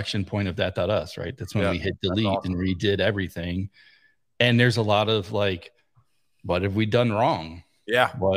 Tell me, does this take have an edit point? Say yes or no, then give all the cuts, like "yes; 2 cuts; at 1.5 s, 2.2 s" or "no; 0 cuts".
no; 0 cuts